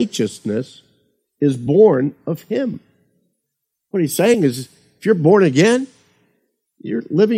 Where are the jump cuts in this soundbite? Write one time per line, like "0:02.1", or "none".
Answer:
none